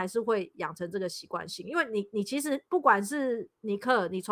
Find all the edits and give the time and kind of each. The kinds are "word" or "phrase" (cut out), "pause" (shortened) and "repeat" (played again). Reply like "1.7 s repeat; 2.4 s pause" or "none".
2.7 s pause